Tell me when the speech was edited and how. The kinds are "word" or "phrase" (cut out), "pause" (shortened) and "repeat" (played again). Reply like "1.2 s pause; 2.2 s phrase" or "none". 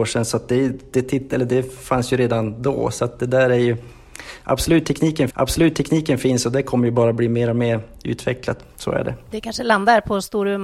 5.3 s repeat